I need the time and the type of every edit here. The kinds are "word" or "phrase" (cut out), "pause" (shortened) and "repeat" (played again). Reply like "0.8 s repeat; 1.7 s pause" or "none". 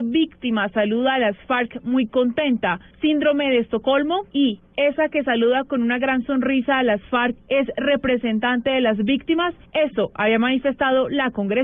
4.3 s pause